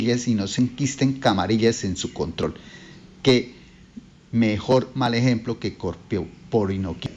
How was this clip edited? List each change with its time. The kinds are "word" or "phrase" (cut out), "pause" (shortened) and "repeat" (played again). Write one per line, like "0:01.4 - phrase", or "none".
none